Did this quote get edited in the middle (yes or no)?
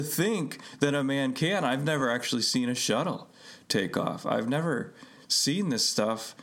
no